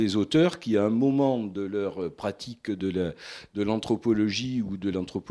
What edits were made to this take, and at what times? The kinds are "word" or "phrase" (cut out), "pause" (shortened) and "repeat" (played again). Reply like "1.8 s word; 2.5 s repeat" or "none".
none